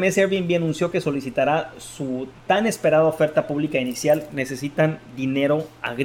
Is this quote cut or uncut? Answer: uncut